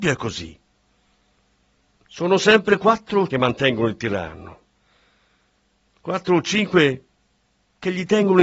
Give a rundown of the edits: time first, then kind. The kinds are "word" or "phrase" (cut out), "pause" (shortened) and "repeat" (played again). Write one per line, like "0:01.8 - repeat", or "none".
0:03.3 - phrase

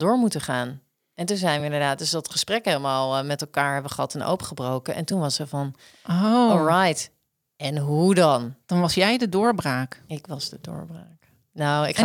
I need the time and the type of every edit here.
none

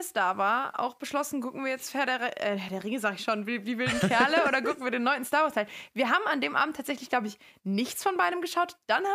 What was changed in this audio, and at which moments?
none

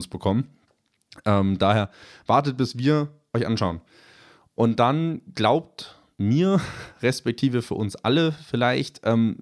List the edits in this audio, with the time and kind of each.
none

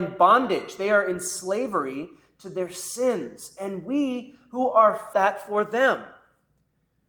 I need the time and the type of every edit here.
0:05.1 - phrase

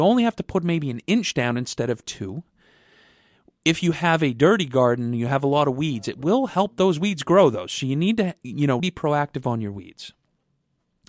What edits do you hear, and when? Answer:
0:08.8 - word

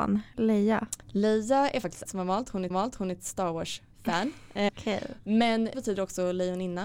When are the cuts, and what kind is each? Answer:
0:01.0 - pause
0:02.1 - word
0:02.7 - repeat
0:04.7 - word
0:05.7 - word

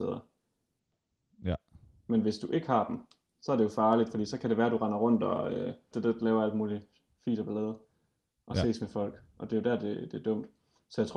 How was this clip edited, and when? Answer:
0:05.9 - word

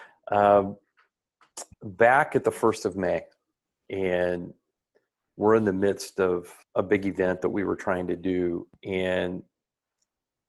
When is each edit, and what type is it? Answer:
0:01.7 - pause
0:06.6 - pause

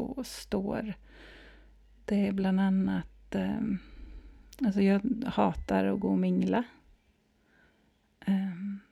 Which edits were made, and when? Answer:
none

